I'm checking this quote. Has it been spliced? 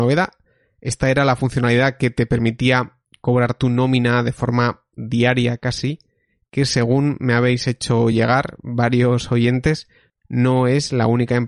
no; 0 cuts

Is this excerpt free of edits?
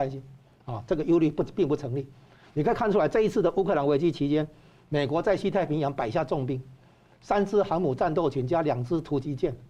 yes; 0 cuts

